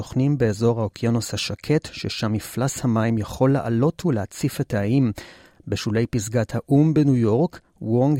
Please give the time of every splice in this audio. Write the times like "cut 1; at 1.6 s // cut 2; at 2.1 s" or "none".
none